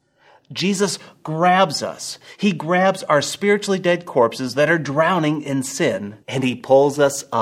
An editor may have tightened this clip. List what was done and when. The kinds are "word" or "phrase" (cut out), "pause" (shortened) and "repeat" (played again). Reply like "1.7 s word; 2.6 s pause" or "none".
6.2 s pause